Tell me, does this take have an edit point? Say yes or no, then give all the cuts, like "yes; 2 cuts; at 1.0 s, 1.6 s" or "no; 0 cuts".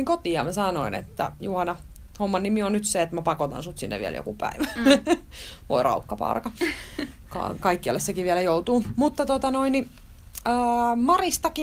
no; 0 cuts